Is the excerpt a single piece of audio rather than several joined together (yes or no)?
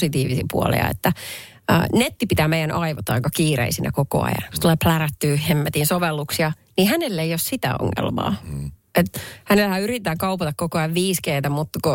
yes